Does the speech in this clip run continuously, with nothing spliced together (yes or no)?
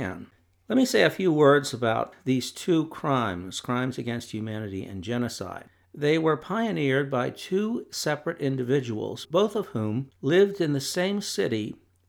yes